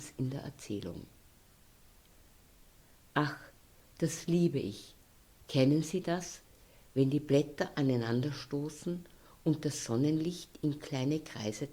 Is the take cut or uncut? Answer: uncut